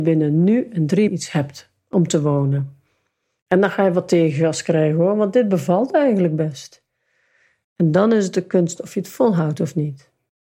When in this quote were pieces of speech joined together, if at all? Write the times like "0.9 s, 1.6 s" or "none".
1.1 s